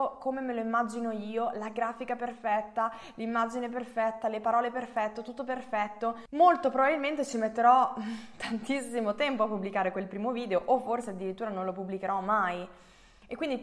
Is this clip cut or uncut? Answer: uncut